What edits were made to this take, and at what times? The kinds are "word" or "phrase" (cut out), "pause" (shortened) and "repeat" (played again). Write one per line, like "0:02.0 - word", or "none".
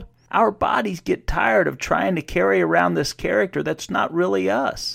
none